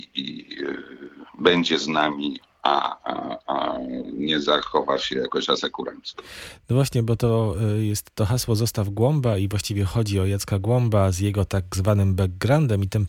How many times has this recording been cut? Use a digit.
1